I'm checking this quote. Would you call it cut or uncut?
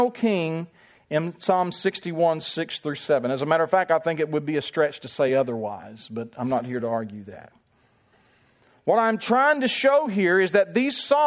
uncut